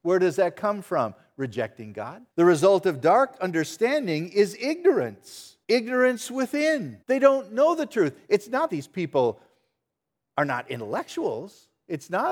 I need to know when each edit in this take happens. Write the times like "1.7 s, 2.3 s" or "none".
2.3 s, 5.6 s, 7.0 s, 8.7 s